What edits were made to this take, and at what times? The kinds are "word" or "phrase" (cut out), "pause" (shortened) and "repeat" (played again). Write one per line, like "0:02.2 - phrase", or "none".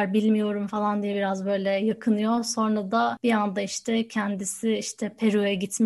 none